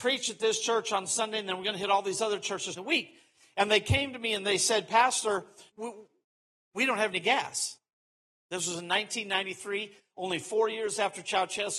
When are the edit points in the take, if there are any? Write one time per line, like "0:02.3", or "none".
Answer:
0:02.8
0:05.7

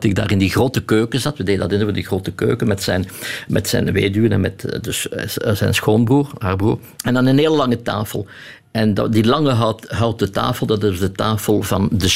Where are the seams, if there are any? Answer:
0:06.9

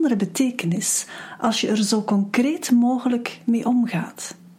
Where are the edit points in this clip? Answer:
none

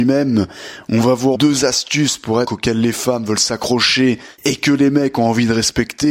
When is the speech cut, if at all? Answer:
0:01.3
0:02.5

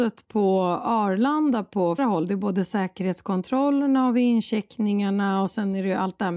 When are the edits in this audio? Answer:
0:02.0

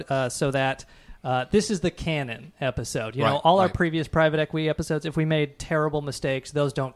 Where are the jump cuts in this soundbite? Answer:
none

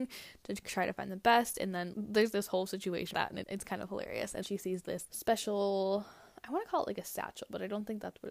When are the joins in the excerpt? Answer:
0:01.9
0:02.3
0:03.1
0:03.4
0:04.4
0:05.1

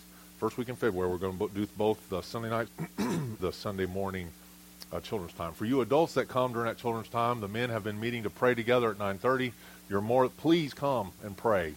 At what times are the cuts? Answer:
0:02.7
0:03.4

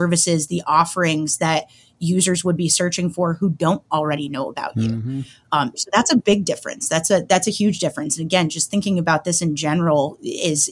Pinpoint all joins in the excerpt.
none

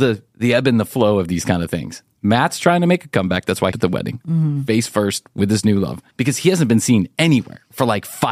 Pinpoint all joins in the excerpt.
0:03.7
0:06.1

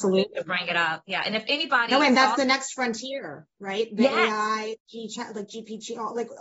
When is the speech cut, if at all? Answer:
0:04.8

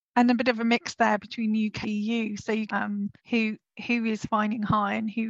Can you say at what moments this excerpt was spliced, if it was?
0:01.8
0:02.7
0:03.2

